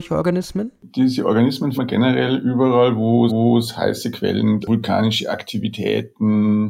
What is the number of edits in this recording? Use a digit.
3